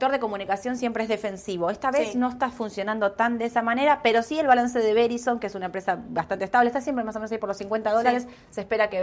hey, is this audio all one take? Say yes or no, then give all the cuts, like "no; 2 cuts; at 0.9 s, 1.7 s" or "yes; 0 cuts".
yes; 0 cuts